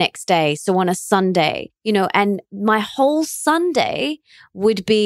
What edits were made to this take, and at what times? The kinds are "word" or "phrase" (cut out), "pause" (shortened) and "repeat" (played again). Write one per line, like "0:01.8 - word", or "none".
0:01.8 - pause